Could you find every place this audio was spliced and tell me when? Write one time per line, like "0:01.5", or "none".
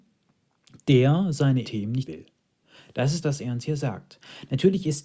0:01.6
0:02.1
0:03.2